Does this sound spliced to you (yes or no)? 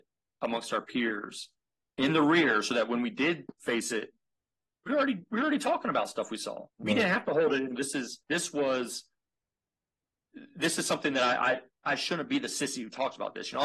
yes